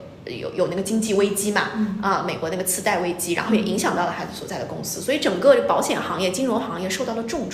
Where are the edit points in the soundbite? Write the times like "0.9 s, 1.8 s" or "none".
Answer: none